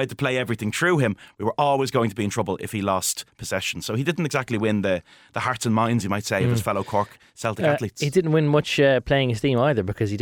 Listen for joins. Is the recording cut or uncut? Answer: uncut